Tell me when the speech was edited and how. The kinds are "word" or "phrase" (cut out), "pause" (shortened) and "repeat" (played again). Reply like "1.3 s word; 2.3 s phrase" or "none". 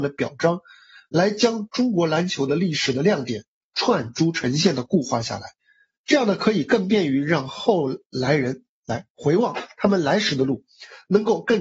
none